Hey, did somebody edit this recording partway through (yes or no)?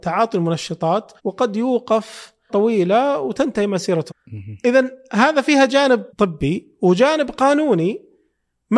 yes